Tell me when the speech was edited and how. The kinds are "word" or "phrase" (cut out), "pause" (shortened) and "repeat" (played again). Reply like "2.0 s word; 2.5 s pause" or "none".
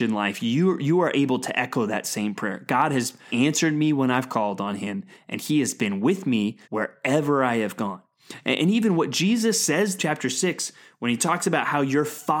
3.3 s word; 6.6 s pause; 10.0 s phrase